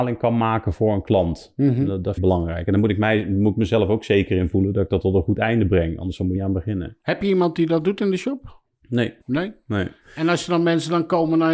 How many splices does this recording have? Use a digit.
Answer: 4